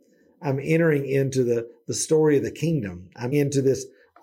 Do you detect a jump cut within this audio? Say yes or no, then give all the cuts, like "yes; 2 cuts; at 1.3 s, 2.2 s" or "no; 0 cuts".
yes; 1 cut; at 3.3 s